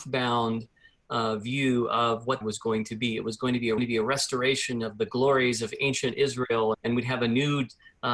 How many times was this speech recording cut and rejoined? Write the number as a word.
three